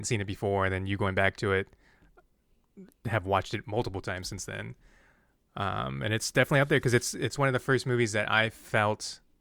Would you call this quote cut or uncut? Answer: uncut